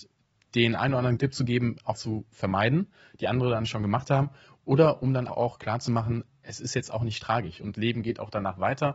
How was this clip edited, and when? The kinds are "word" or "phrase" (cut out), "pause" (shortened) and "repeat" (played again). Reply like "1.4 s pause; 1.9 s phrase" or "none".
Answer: 1.2 s word; 1.9 s word; 5.3 s word; 7.7 s word